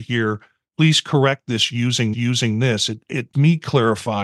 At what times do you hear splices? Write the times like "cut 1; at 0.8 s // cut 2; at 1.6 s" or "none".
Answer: cut 1; at 2.1 s // cut 2; at 3.3 s